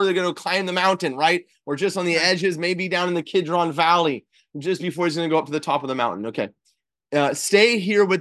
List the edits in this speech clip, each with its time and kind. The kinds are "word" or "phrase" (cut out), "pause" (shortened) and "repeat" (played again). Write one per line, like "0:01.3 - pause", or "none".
none